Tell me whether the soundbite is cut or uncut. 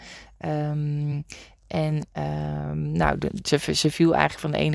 uncut